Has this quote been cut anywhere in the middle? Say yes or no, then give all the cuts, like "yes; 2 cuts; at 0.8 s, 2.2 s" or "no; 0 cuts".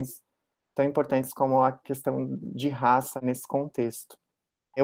no; 0 cuts